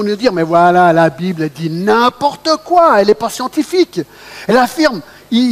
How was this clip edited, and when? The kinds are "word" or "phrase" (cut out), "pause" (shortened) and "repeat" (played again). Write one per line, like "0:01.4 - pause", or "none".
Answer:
none